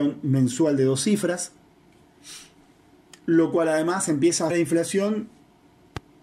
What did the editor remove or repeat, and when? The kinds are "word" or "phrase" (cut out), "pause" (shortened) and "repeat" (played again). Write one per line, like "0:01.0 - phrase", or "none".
0:04.5 - word